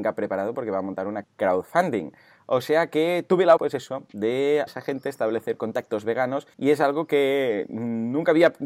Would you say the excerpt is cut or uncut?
cut